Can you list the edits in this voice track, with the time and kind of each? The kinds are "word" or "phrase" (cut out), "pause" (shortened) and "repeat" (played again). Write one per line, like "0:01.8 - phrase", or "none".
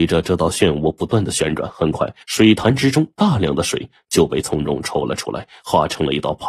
0:02.2 - pause